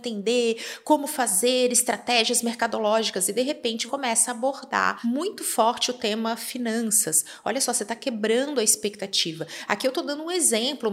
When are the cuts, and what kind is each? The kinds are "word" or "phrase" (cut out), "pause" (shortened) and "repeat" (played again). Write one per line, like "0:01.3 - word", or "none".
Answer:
0:03.9 - word